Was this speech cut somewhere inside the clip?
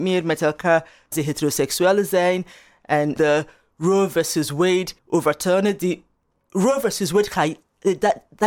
yes; 3 cuts; at 1.1 s, 3.2 s, 5.0 s

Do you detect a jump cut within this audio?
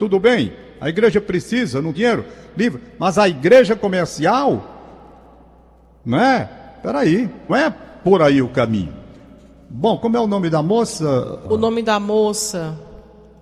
yes; 3 cuts; at 1.9 s, 7.5 s, 11.5 s

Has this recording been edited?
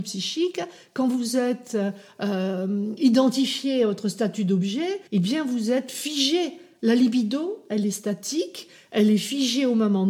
yes; 1 cut; at 5.1 s

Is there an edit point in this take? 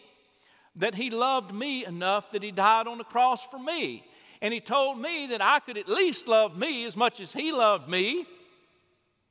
no; 0 cuts

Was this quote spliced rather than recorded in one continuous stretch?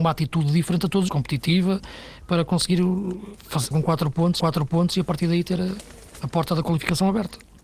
yes; 3 cuts; at 1.1 s, 3.7 s, 4.4 s

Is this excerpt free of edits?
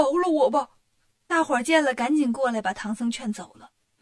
yes; 0 cuts

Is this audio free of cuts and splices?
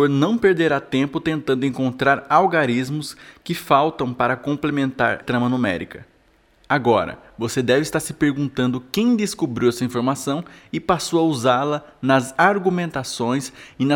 no; 1 cut; at 5.2 s

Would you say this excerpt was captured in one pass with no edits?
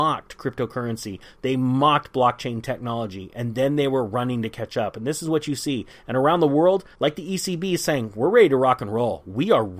no; 1 cut; at 6.9 s

